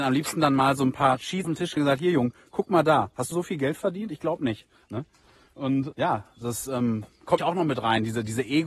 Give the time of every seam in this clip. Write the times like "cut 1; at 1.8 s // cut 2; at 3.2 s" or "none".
cut 1; at 1.4 s // cut 2; at 1.8 s // cut 3; at 3.3 s // cut 4; at 5.9 s // cut 5; at 7.4 s